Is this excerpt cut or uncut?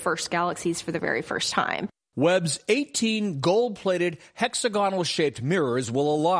uncut